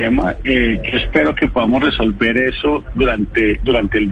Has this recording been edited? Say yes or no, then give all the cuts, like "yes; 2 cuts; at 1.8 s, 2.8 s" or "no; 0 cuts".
no; 0 cuts